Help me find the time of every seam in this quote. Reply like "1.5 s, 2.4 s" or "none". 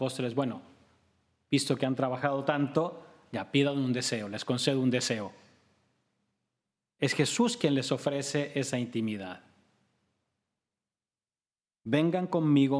none